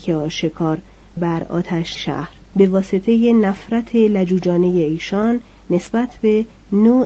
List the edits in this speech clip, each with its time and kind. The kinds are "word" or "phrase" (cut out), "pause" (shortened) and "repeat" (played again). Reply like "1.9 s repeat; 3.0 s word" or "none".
1.2 s word; 1.9 s word; 2.4 s word